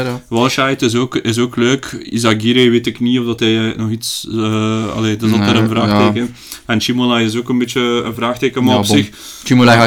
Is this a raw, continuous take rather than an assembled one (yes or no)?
yes